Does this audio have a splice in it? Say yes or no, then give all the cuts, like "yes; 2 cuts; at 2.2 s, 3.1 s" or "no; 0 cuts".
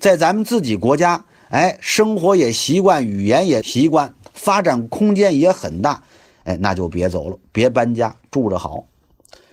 no; 0 cuts